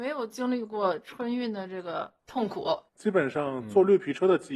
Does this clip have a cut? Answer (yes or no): yes